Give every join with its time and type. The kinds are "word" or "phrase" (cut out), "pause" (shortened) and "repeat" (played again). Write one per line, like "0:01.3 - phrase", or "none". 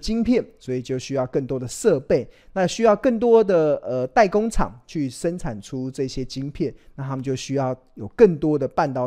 none